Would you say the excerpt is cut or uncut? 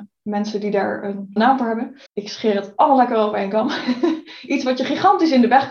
cut